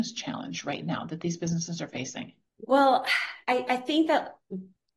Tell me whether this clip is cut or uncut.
cut